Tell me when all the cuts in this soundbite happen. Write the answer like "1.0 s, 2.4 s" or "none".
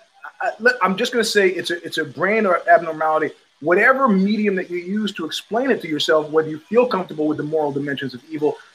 none